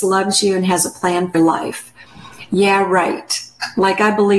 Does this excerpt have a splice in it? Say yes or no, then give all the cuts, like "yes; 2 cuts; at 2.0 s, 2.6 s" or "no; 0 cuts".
yes; 1 cut; at 1.3 s